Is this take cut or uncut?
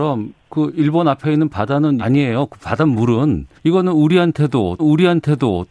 cut